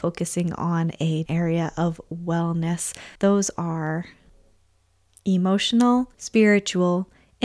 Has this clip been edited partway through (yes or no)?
yes